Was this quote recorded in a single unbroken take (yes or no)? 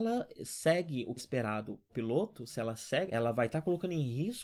no